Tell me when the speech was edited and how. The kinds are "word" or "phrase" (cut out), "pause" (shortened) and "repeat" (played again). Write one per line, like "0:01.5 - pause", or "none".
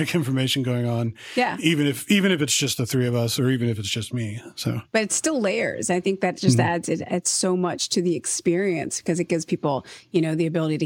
none